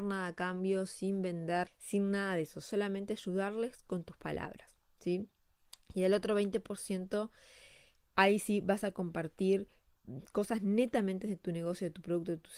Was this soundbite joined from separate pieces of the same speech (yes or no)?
yes